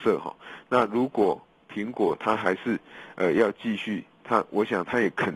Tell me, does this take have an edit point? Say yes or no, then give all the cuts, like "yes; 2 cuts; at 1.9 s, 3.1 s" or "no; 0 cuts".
no; 0 cuts